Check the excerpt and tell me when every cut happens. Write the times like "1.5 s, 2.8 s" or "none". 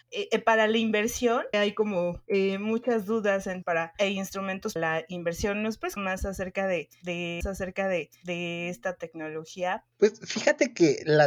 1.5 s, 2.3 s, 3.6 s, 4.8 s, 6.0 s, 7.4 s